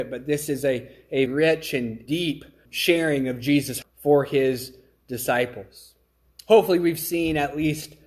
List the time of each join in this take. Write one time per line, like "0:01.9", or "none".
0:01.3
0:02.1
0:02.7
0:03.8

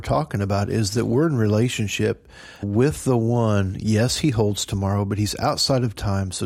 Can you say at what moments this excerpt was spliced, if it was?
0:02.6

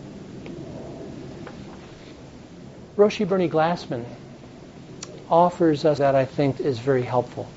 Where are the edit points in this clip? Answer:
0:06.0
0:06.6

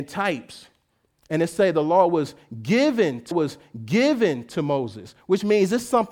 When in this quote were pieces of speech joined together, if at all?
0:03.3

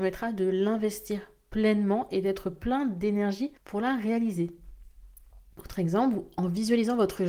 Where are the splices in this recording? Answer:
0:03.6

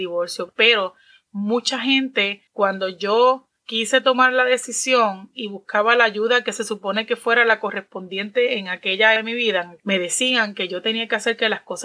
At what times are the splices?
0:02.5
0:03.6
0:09.2

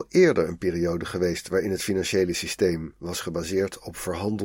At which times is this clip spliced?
none

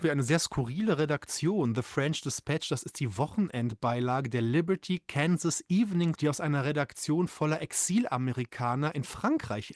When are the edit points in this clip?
0:06.1

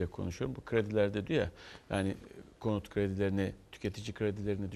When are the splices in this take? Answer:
0:01.3

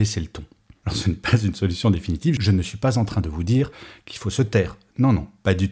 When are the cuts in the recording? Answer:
none

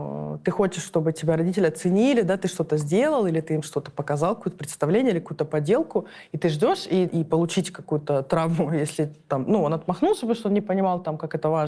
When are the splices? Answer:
0:07.1

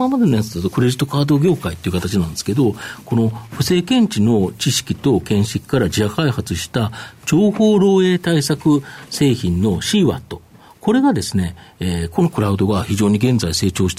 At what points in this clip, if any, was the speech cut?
none

